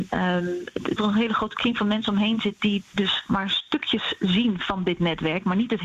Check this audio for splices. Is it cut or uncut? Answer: cut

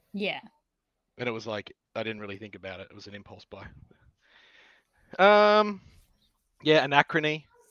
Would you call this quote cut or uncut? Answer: uncut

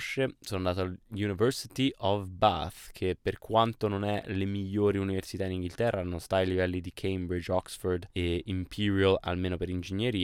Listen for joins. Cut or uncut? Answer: cut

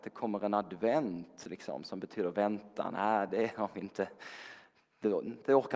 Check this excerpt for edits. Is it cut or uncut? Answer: uncut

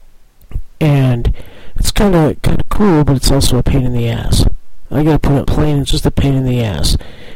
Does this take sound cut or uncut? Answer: cut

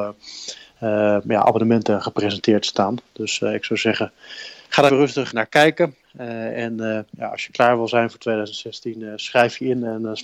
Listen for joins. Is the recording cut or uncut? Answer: cut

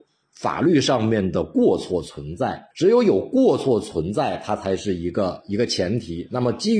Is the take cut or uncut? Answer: cut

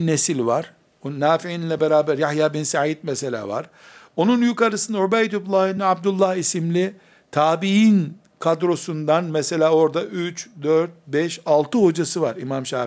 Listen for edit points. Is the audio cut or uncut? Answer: uncut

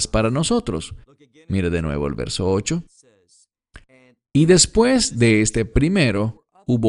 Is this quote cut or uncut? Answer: uncut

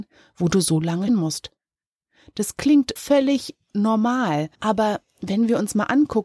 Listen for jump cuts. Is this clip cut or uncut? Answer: cut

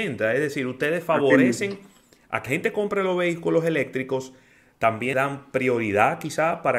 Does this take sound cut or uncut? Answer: cut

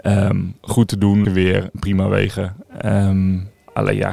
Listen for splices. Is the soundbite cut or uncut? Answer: cut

